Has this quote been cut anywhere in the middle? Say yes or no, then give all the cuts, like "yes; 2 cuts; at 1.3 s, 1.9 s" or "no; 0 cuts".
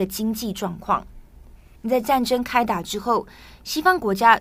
yes; 1 cut; at 1.8 s